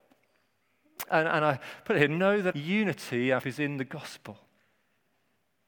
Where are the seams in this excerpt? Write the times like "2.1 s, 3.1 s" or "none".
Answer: 2.5 s, 3.4 s